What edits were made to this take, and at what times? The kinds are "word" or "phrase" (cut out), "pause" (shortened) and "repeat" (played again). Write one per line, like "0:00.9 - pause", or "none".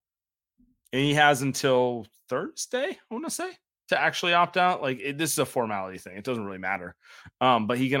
none

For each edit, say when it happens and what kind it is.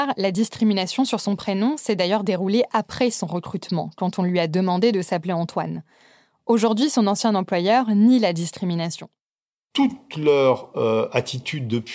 none

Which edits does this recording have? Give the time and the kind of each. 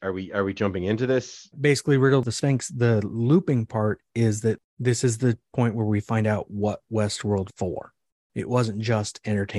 0:01.5 - word
0:07.5 - word

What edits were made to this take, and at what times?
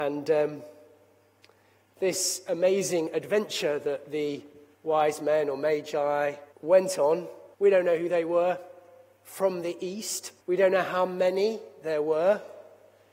0:04.7 - pause
0:06.5 - pause
0:07.5 - pause
0:10.4 - pause

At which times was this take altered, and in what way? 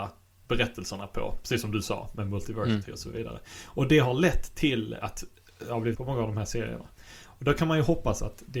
0:05.0 - word
0:05.9 - phrase

